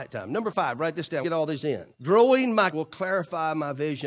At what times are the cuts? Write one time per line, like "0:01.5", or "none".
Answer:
0:01.2
0:01.9
0:02.7